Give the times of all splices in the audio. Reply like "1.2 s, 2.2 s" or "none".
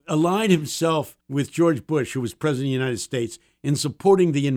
1.2 s

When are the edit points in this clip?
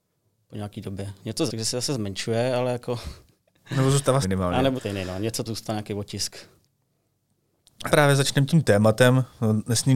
1.5 s, 4.2 s, 4.8 s, 5.4 s, 7.9 s

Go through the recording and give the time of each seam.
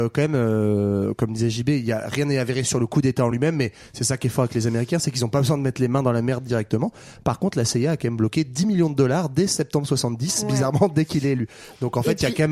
none

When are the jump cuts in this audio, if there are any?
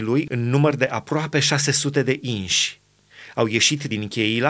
none

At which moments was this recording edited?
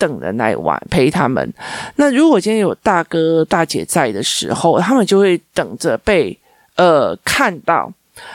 none

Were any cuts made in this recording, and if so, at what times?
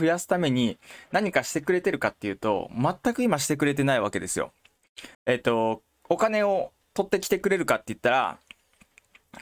5.1 s, 6.8 s

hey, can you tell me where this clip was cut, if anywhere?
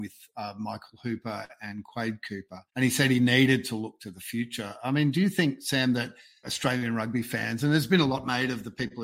2.7 s, 6.4 s

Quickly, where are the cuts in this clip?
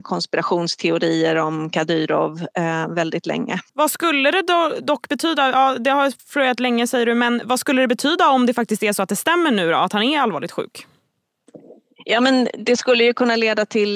3.7 s

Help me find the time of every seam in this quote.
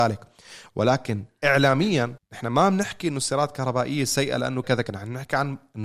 2.2 s, 4.6 s

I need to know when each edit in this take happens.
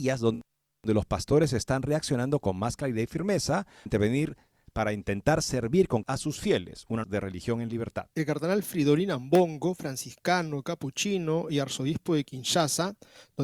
3.9 s, 6.0 s, 7.0 s, 8.1 s

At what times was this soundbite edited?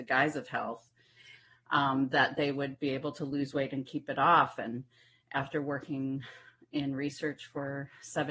none

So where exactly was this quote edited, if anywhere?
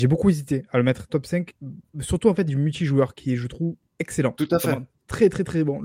1.1 s, 1.9 s, 2.5 s

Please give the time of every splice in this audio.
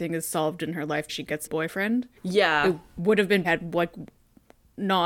1.1 s, 1.5 s, 2.2 s, 3.4 s

